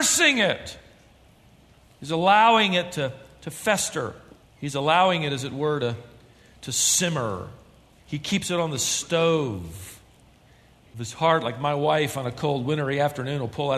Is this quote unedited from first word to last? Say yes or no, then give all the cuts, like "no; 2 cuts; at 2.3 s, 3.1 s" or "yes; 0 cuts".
no; 1 cut; at 4.4 s